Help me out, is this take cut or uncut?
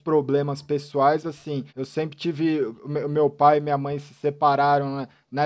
cut